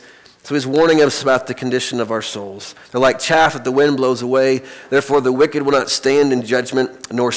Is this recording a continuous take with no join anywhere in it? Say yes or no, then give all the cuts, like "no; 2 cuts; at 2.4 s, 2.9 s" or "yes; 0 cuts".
yes; 0 cuts